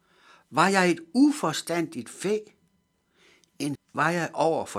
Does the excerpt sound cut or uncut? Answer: cut